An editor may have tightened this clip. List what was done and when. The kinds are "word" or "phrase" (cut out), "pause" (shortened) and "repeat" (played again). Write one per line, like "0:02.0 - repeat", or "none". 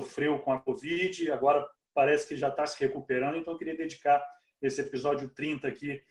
none